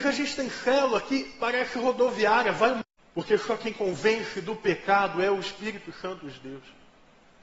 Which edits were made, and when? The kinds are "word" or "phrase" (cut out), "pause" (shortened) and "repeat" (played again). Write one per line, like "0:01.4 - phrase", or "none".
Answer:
0:03.0 - pause